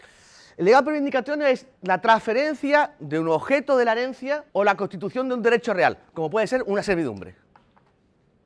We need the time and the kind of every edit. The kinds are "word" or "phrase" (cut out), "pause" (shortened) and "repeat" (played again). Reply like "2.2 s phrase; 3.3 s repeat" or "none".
1.8 s pause; 4.5 s pause